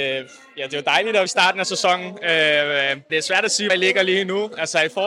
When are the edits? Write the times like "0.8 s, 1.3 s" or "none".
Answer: 1.3 s, 3.1 s, 3.7 s